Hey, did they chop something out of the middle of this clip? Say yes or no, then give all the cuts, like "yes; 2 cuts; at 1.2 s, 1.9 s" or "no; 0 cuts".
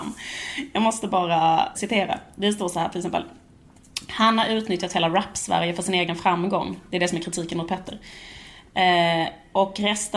yes; 1 cut; at 1.7 s